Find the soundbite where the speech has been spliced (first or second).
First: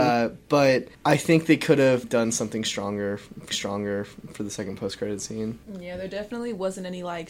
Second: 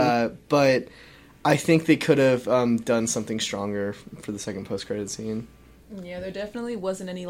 first